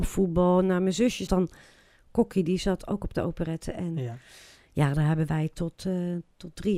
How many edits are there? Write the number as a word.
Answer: one